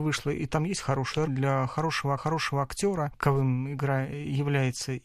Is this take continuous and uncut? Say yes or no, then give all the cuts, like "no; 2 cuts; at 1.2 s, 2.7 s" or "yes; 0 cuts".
no; 2 cuts; at 1.3 s, 2.2 s